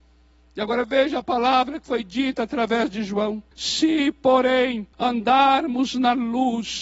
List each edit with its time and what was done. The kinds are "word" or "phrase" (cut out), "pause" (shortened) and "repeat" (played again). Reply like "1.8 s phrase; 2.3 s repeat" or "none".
3.5 s pause; 4.9 s pause